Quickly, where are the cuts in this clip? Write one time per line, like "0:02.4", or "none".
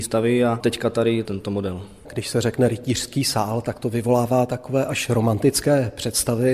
none

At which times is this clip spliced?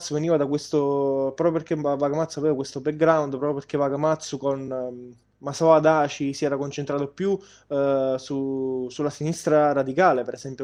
none

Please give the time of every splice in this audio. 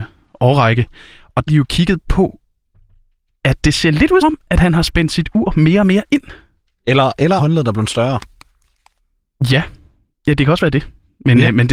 0:01.5
0:04.2
0:07.4

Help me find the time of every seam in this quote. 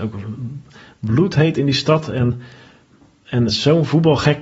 0:03.5

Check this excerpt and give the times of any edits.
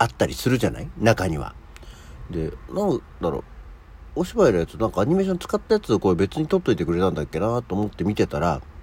0:02.7

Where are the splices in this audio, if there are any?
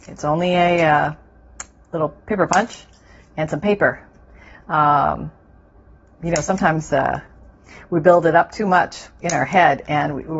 none

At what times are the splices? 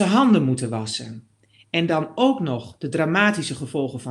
none

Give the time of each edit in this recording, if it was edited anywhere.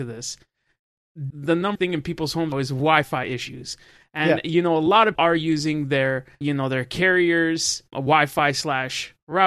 0:01.3
0:01.8
0:02.5
0:05.2
0:06.4
0:07.9

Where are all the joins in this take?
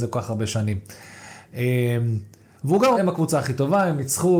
0:02.9

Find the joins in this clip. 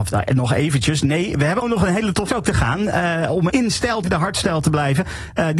0:01.6
0:02.3
0:03.5
0:04.0

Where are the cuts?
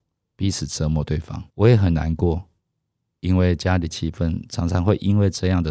0:01.5

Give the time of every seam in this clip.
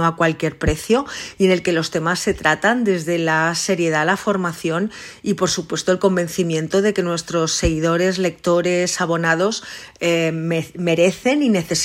none

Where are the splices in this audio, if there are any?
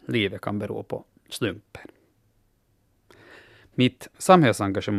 none

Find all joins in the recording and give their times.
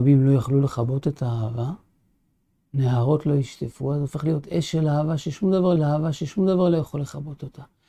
0:05.8

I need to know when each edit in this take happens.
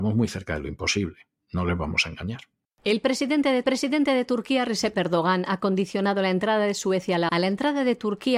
0:03.6
0:04.9
0:07.3

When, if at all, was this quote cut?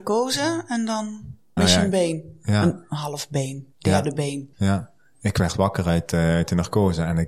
0:01.6
0:03.7
0:04.5

